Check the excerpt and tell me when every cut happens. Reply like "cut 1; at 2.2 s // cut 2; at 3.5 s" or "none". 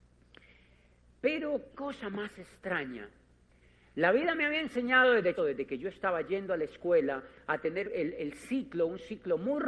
cut 1; at 1.7 s // cut 2; at 5.4 s // cut 3; at 7.8 s